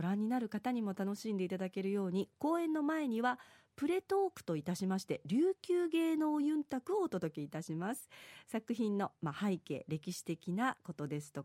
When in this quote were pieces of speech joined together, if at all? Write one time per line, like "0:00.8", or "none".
none